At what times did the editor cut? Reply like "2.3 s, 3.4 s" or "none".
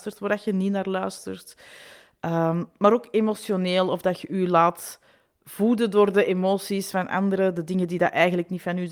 none